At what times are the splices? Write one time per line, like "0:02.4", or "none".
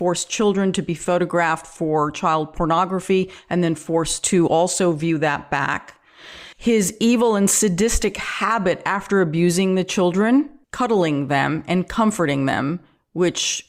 0:06.5
0:10.6